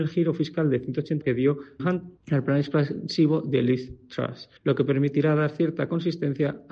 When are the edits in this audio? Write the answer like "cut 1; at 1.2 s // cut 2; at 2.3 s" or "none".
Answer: cut 1; at 1.2 s // cut 2; at 1.8 s // cut 3; at 2.2 s // cut 4; at 4.6 s